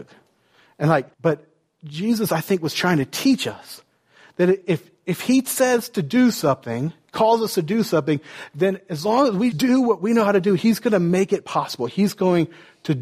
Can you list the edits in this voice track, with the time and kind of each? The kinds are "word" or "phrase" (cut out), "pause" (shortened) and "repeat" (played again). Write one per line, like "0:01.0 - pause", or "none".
0:01.1 - pause
0:04.6 - word
0:09.5 - word